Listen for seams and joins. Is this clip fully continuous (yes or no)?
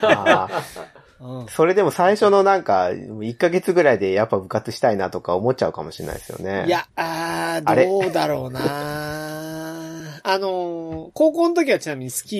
no